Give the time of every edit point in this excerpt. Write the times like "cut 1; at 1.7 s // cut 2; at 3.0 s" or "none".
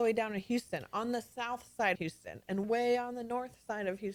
cut 1; at 1.9 s // cut 2; at 2.6 s